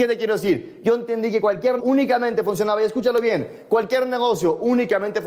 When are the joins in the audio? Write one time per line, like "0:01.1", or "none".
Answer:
0:01.8